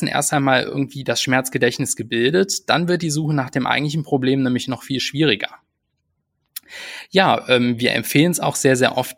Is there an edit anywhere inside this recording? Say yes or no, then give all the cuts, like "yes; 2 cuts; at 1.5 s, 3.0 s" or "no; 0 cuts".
no; 0 cuts